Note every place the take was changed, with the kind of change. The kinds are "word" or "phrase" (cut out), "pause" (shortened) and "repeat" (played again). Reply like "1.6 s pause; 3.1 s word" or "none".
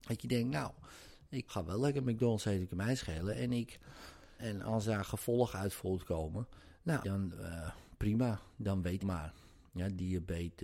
1.5 s word; 4.4 s word; 7.0 s word; 9.0 s phrase